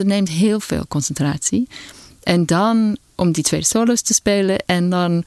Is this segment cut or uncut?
uncut